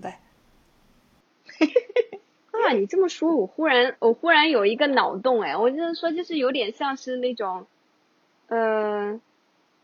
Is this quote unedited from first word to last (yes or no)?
yes